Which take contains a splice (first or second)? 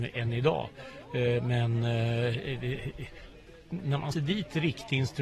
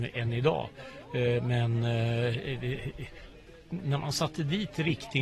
first